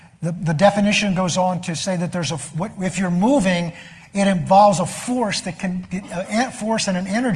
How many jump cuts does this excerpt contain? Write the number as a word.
zero